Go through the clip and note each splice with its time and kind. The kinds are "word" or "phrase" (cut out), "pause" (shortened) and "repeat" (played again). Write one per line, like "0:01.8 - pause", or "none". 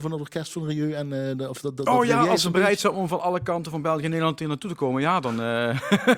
none